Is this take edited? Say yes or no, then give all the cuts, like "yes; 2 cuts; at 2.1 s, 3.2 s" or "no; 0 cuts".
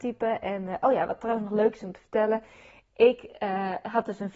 no; 0 cuts